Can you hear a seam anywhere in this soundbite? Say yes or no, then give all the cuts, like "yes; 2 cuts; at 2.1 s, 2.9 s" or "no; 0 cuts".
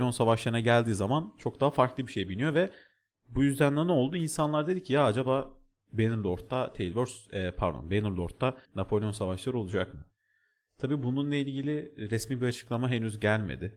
yes; 1 cut; at 8.6 s